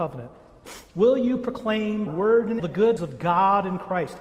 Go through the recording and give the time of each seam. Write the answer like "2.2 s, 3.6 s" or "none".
2.1 s, 2.6 s, 3.0 s